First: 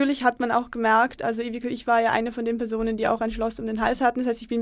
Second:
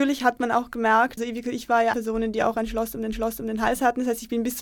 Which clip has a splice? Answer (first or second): second